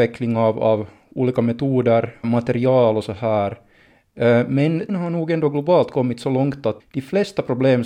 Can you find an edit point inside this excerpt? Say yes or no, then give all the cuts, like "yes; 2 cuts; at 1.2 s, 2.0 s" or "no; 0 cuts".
yes; 3 cuts; at 2.2 s, 4.9 s, 6.8 s